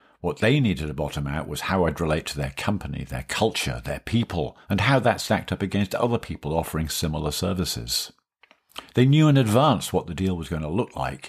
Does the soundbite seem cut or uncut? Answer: cut